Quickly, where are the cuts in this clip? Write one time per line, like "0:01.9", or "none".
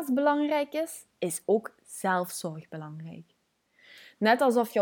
none